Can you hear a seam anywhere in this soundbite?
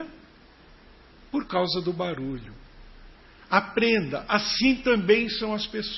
no; 0 cuts

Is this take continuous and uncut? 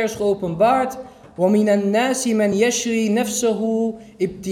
yes; 0 cuts

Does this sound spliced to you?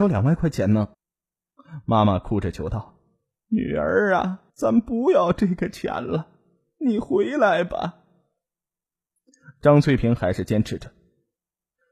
yes; 2 cuts; at 0.9 s, 4.5 s

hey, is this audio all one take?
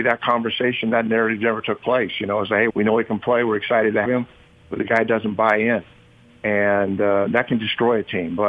no; 2 cuts; at 2.7 s, 4.1 s

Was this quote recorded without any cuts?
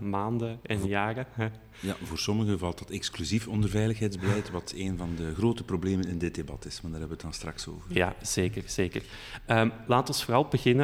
yes; 0 cuts

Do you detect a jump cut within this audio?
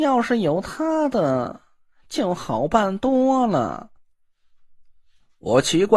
no; 0 cuts

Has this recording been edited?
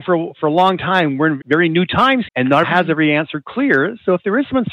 yes; 3 cuts; at 1.4 s, 2.2 s, 2.6 s

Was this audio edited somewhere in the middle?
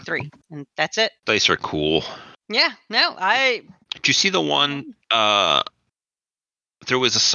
yes; 2 cuts; at 1.2 s, 3.8 s

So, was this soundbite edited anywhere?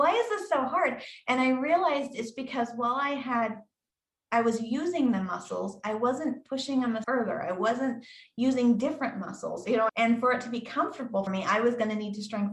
yes; 3 cuts; at 7.0 s, 9.9 s, 11.3 s

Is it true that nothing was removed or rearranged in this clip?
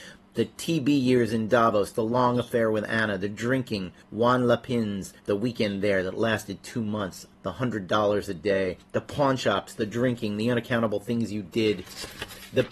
no; 4 cuts; at 4.0 s, 5.2 s, 7.3 s, 8.8 s

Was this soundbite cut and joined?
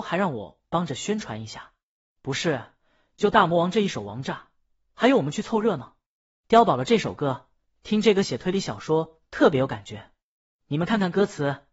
no; 0 cuts

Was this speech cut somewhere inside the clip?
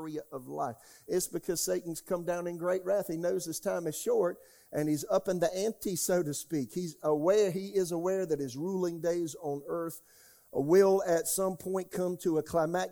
no; 0 cuts

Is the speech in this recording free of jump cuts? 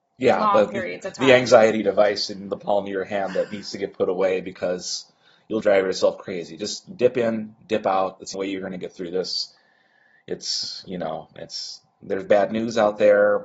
no; 3 cuts; at 5.6 s, 8.3 s, 11.4 s

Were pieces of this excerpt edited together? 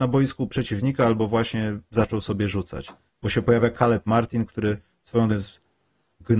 yes; 1 cut; at 5.3 s

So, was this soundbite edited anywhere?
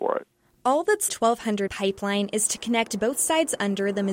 yes; 2 cuts; at 1.1 s, 1.7 s

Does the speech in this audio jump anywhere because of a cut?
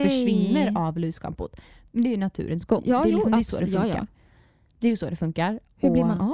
no; 0 cuts

